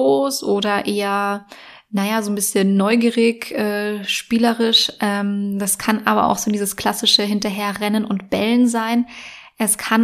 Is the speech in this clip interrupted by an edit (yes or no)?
no